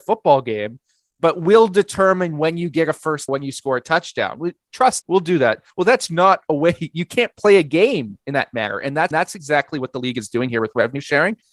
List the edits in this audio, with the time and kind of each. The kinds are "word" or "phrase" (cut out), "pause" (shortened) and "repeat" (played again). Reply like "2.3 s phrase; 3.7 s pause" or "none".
3.3 s phrase; 5.0 s word; 5.7 s pause; 6.1 s word; 9.1 s repeat

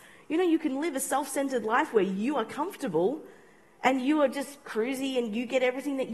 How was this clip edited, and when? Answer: none

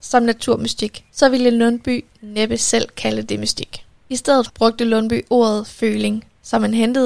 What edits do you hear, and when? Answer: 1.1 s pause; 4.0 s pause

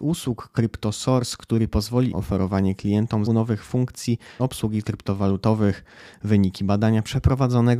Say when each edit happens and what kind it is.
2.1 s phrase; 3.3 s word; 4.4 s phrase; 4.8 s word

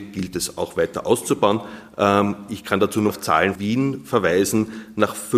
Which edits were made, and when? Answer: 3.1 s word; 3.6 s word

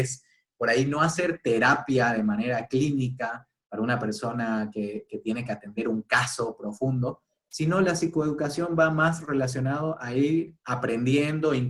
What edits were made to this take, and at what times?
10.6 s pause

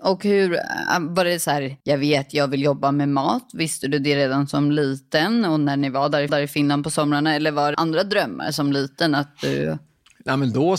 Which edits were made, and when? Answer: 1.8 s pause; 6.3 s repeat; 7.7 s phrase

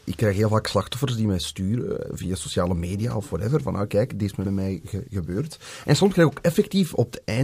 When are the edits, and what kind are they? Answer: 2.0 s word; 4.4 s word; 5.0 s word

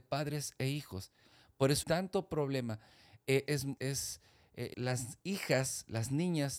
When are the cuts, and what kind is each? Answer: 1.8 s word; 3.5 s word; 3.8 s word; 4.7 s word

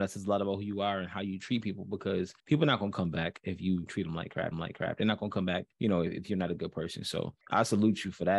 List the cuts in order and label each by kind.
2.4 s pause; 4.5 s repeat; 5.7 s pause; 7.4 s pause

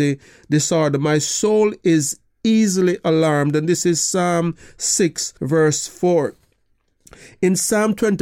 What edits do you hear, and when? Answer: 5.4 s pause

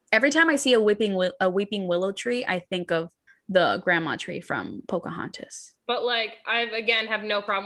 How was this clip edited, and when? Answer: 3.3 s pause; 5.8 s pause

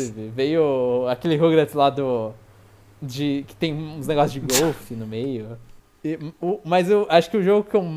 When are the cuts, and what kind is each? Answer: none

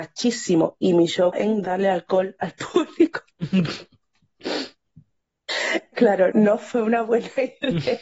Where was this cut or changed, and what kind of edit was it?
1.3 s word; 5.9 s word; 6.3 s word

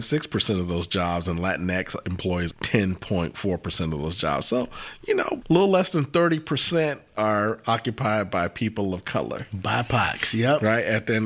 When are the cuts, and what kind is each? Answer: 2.5 s word; 5.4 s word

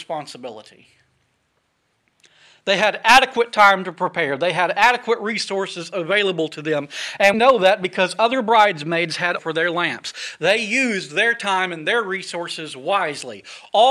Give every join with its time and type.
7.3 s word; 9.4 s word

